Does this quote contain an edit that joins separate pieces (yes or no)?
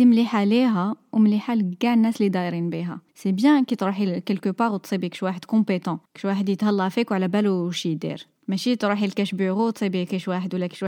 yes